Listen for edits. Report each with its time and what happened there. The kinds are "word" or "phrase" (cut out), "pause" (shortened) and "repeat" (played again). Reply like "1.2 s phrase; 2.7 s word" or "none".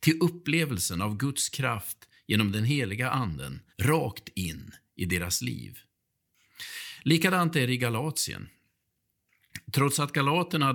3.7 s pause

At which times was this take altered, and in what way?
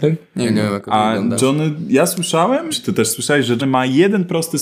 2.7 s phrase; 3.6 s word

